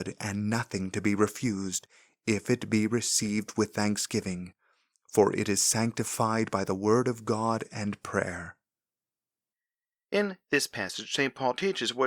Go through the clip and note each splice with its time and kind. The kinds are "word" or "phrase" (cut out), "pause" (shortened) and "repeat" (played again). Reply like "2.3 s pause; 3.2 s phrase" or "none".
none